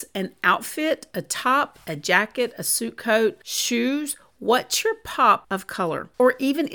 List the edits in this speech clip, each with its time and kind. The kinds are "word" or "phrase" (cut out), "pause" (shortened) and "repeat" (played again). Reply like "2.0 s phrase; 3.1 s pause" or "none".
none

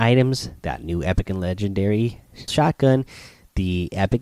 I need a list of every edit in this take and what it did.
2.5 s word

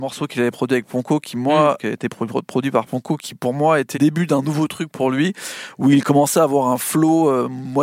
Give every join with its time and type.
1.8 s phrase; 3.9 s word

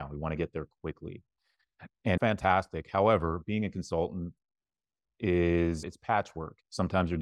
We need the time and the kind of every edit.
2.2 s word; 5.8 s word

